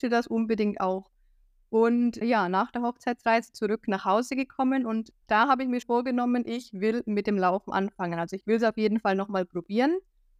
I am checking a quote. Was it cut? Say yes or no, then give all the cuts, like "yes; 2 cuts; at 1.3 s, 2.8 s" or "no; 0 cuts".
yes; 3 cuts; at 2.2 s, 5.2 s, 5.8 s